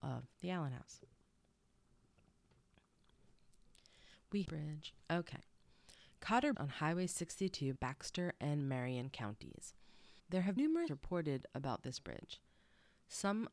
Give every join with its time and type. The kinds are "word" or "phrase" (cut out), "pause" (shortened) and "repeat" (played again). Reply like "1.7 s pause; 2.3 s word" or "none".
4.5 s phrase; 5.0 s pause; 6.5 s word; 7.8 s word; 10.2 s pause; 10.6 s word; 10.9 s phrase